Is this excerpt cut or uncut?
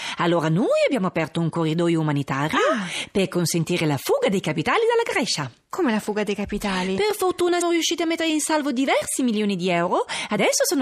cut